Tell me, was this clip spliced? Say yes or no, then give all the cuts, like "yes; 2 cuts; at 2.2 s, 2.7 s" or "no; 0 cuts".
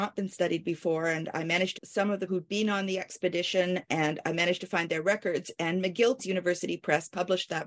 yes; 3 cuts; at 1.7 s, 2.3 s, 6.2 s